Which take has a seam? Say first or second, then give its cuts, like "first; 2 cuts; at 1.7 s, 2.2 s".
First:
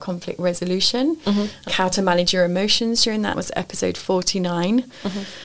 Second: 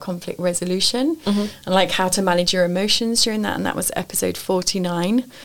first; 2 cuts; at 1.7 s, 3.3 s